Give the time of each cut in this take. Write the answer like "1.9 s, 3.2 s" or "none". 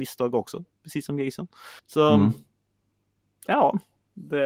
1.8 s